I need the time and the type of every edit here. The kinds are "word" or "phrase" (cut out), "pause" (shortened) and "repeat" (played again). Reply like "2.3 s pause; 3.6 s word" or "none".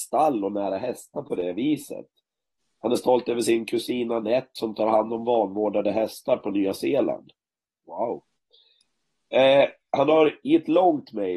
none